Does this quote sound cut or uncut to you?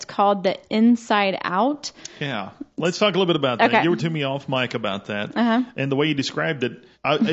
cut